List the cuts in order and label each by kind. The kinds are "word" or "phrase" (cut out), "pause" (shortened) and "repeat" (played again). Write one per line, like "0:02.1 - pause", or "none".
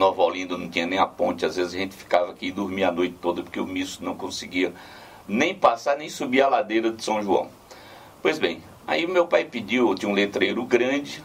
0:05.2 - pause